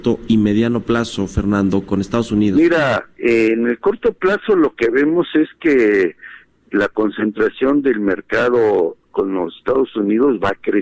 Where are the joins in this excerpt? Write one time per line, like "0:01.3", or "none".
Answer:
none